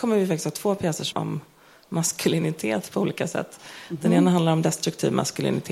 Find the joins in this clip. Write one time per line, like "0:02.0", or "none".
0:01.1